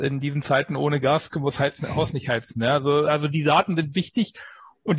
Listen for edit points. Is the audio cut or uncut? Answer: uncut